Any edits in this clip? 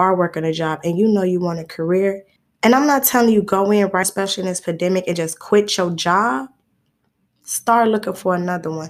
yes; 2 cuts; at 2.4 s, 4.0 s

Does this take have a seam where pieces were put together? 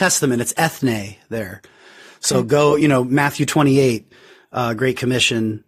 no; 0 cuts

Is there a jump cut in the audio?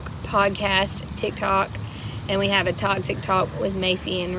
no; 0 cuts

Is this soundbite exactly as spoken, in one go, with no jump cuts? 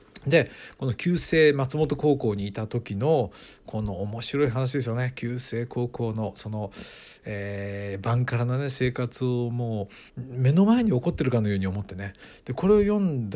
no; 1 cut; at 10.1 s

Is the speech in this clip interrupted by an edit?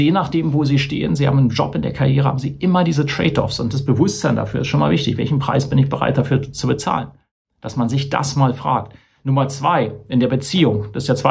no; 0 cuts

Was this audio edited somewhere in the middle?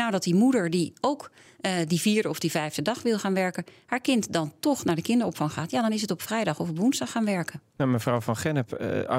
no; 0 cuts

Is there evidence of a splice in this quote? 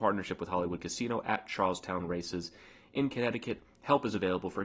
no; 0 cuts

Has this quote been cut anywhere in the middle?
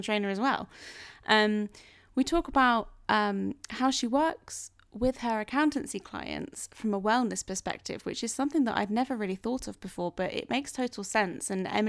no; 0 cuts

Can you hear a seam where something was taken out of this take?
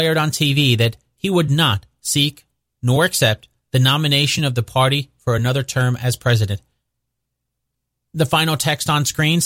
no; 0 cuts

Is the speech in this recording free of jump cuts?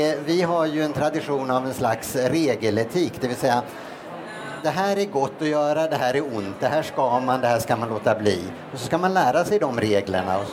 yes; 0 cuts

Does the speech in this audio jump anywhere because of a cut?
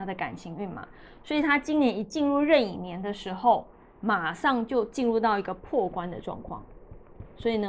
no; 0 cuts

